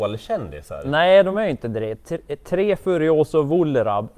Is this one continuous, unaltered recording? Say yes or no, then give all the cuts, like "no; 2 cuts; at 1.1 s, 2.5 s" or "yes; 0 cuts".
yes; 0 cuts